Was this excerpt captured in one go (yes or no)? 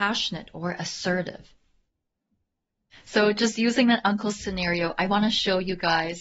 yes